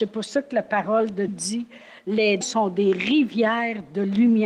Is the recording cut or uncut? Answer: cut